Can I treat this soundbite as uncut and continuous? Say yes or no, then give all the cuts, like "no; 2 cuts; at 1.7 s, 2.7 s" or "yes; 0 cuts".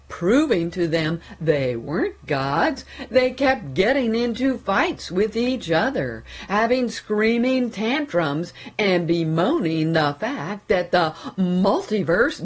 yes; 0 cuts